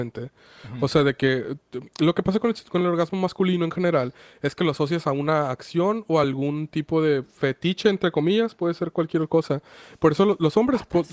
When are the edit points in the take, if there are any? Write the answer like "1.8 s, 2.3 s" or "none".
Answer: none